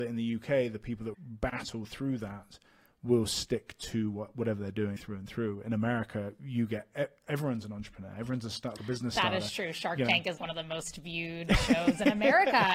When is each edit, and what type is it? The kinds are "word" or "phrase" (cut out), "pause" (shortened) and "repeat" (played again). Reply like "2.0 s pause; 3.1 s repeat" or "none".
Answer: 1.1 s word; 5.0 s word; 8.8 s word; 10.4 s word